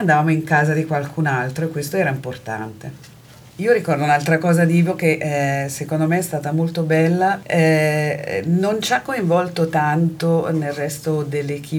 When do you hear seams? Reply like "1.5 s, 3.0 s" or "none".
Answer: none

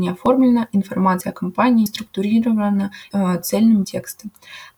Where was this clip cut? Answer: 1.9 s, 3.1 s, 3.8 s

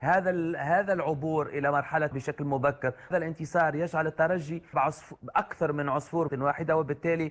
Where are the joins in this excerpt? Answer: 2.1 s, 3.1 s, 4.7 s, 6.3 s

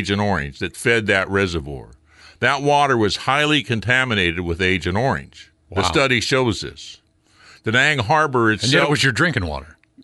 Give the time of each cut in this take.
5.6 s

